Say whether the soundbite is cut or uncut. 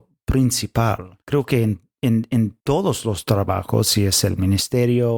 cut